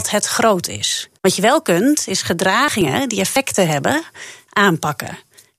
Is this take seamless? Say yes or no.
no